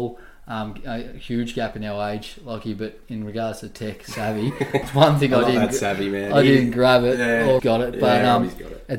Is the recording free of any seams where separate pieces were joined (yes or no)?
no